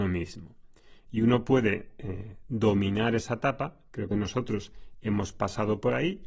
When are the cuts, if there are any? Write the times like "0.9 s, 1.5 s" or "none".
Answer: 4.1 s